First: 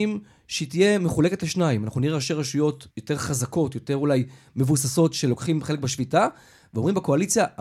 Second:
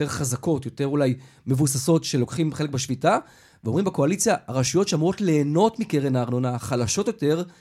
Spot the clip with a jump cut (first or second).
first